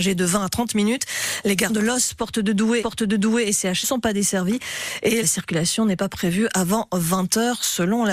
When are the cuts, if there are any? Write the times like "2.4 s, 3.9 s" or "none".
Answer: 1.7 s, 2.8 s, 3.8 s, 5.2 s